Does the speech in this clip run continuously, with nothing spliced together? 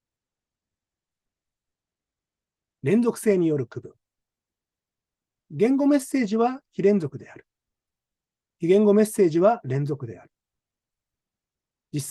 yes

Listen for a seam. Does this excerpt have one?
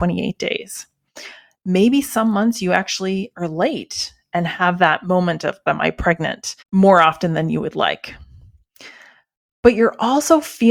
yes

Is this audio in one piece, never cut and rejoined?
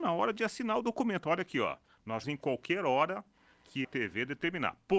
no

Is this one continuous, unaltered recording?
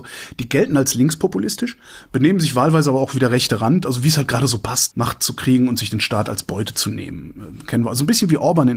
no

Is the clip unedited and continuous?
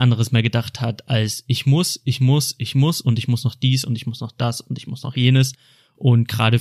yes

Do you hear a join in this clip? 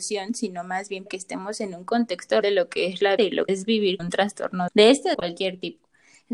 yes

